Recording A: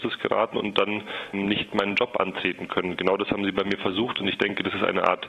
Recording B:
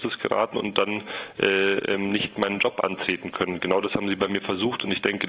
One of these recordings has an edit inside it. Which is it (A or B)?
A